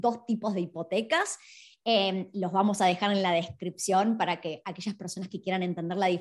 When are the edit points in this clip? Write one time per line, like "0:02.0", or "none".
none

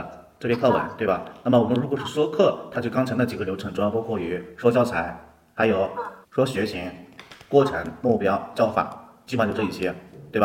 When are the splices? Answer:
0:06.2

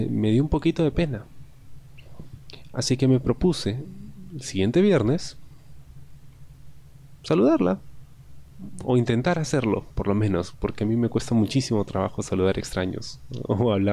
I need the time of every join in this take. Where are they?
none

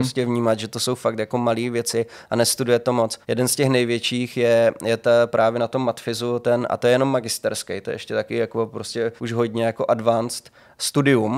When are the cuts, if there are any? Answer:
0:03.2
0:09.2

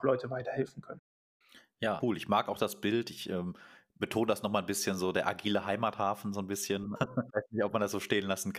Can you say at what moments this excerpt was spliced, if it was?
0:02.0

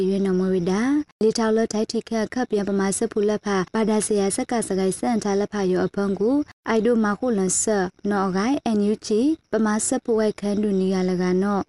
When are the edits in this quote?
0:08.0

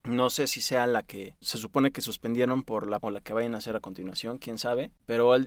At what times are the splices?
0:03.0

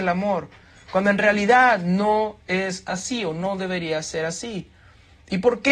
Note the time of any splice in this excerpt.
none

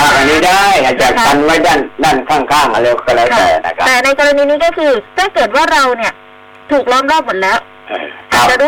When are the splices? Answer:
0:05.1

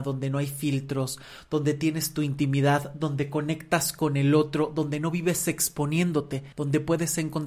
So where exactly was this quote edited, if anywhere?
0:06.5

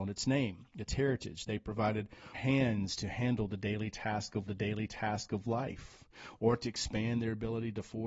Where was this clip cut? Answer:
0:02.3
0:04.5

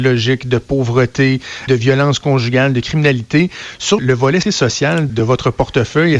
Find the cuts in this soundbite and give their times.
0:01.7
0:04.0
0:04.4
0:05.1

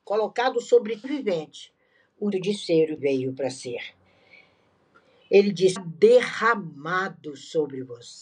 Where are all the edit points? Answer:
0:01.0
0:02.3
0:03.0
0:05.8

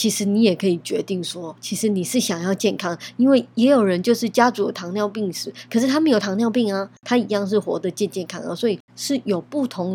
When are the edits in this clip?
0:07.0
0:08.9

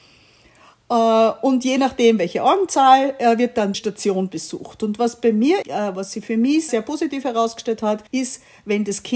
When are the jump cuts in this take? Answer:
0:03.7
0:05.6
0:06.7
0:08.1

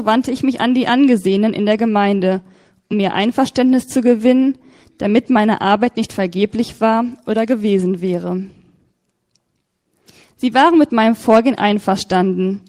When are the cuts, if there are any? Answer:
none

